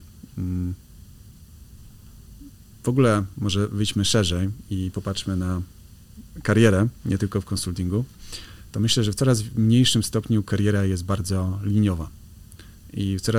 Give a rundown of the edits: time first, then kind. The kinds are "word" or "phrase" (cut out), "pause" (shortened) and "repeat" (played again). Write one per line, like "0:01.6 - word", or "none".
none